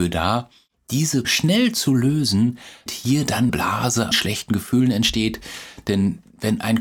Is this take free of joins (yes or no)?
no